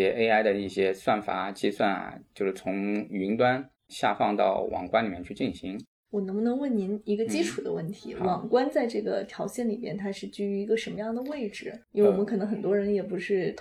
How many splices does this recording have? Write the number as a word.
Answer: one